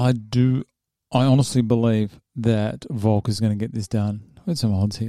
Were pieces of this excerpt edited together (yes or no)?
no